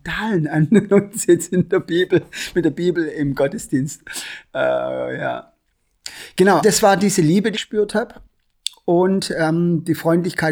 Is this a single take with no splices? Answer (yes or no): no